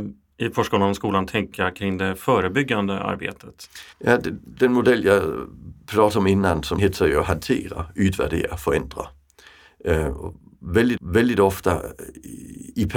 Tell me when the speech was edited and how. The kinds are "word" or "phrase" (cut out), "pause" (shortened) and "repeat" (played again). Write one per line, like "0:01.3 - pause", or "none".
0:03.9 - pause
0:06.8 - phrase
0:11.0 - repeat